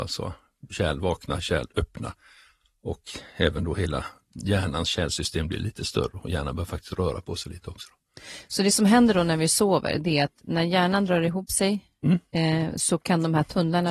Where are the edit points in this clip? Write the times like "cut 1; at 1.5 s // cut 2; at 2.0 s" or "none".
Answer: none